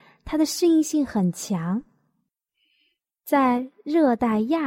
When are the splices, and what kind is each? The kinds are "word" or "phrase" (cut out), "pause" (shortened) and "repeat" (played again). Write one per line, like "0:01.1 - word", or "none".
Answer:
none